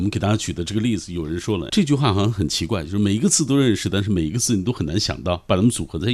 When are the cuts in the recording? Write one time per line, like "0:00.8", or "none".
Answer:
0:01.7